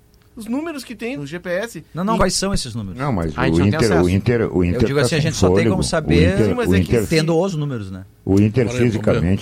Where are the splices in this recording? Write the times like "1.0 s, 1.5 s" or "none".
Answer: 1.2 s, 2.2 s

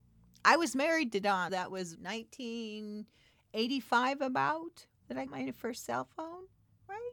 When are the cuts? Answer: 1.5 s, 1.9 s, 5.3 s

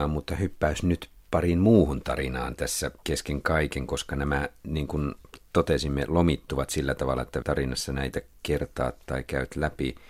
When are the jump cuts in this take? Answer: 3.0 s, 7.4 s

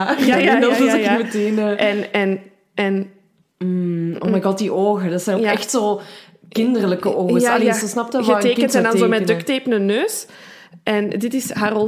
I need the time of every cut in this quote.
none

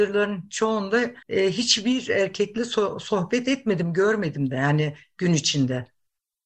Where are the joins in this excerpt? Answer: 1.2 s

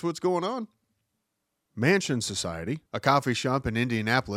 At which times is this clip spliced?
2.9 s

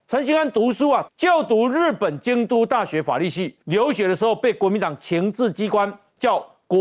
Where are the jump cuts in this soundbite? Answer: 1.1 s, 3.6 s

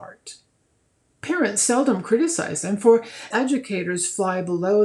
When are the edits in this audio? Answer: 3.3 s

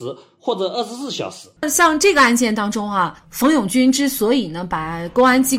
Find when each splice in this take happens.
1.6 s

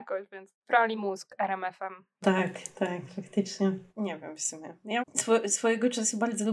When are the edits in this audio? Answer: 1.0 s, 3.9 s, 5.0 s

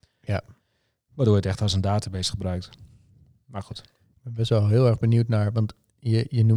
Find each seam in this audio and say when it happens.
3.1 s

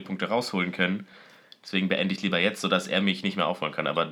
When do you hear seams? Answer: none

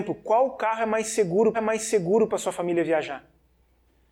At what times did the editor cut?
1.5 s

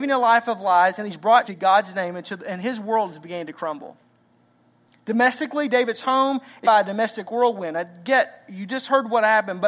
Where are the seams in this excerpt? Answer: 1.4 s, 6.6 s

